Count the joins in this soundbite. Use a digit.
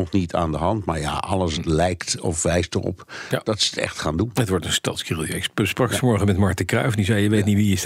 0